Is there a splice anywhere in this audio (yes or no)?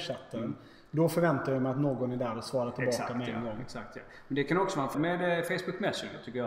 yes